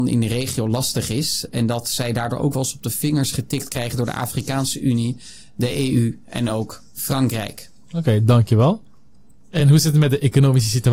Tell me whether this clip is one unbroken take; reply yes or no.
yes